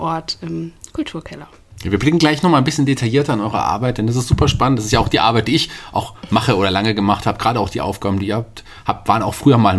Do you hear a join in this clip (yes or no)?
no